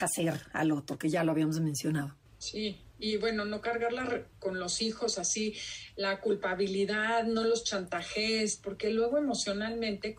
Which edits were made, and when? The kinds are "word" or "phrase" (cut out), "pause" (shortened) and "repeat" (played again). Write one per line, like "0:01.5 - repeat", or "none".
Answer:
0:02.2 - pause